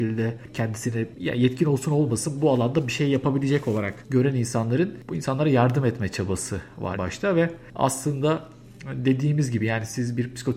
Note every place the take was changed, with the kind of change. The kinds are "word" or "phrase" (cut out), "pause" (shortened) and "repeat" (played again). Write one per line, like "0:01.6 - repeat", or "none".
0:06.9 - word